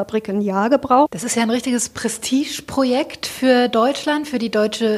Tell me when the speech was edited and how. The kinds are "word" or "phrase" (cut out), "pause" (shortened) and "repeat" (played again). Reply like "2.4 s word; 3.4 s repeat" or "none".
none